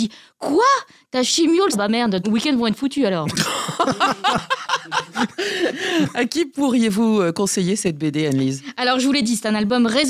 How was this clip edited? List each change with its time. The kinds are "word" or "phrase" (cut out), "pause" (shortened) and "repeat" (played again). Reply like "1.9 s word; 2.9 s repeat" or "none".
1.7 s word; 2.2 s phrase